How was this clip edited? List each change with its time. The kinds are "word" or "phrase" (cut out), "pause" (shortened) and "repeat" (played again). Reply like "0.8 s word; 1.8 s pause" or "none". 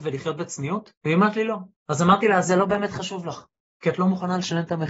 1.0 s pause; 1.8 s pause